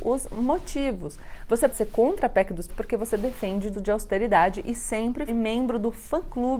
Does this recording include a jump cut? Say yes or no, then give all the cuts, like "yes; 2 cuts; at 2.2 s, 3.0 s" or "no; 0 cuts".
yes; 4 cuts; at 1.7 s, 2.7 s, 3.7 s, 5.3 s